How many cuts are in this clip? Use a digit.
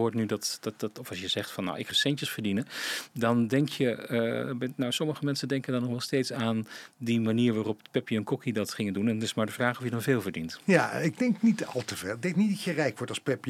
1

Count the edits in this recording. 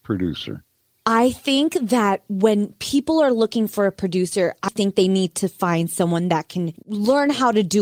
1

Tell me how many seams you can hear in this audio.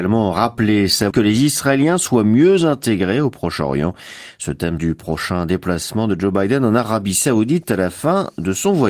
2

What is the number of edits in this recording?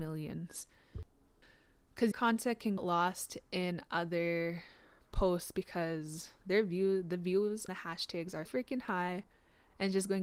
4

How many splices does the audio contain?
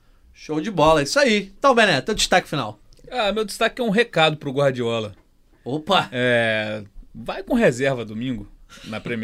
0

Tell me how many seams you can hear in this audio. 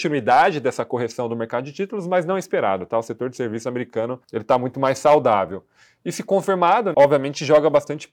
2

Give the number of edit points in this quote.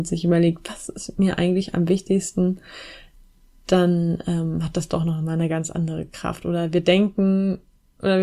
0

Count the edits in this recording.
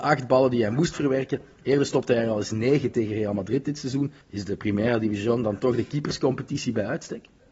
1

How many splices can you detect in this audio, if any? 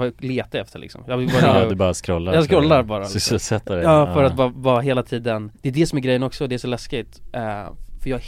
1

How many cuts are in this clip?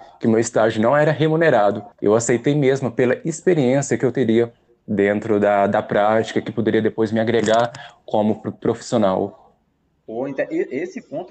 1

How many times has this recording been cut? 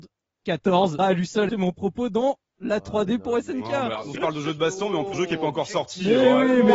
4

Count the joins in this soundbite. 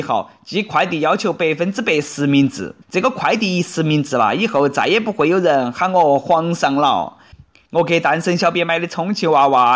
1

